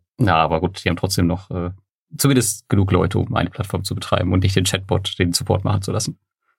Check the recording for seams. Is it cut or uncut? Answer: uncut